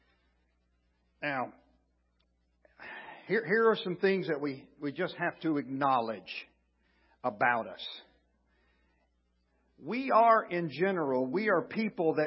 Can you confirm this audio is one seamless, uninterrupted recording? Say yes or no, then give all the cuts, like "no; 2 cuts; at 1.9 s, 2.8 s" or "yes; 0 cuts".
yes; 0 cuts